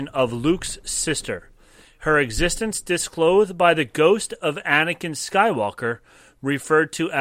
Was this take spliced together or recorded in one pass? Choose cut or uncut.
uncut